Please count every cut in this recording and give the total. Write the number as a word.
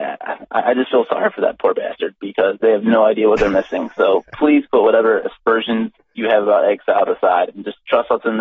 zero